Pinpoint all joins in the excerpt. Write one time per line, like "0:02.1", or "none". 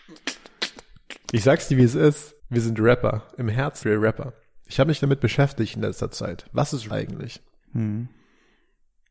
0:02.4
0:03.8
0:06.9